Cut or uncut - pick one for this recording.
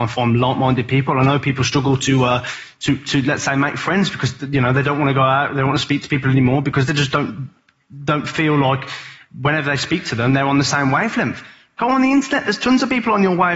uncut